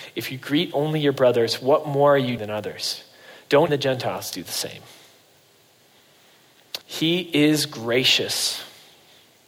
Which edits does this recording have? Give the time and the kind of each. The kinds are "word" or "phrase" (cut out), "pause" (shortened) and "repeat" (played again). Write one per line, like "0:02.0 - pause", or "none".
0:02.4 - word
0:03.7 - word
0:06.8 - pause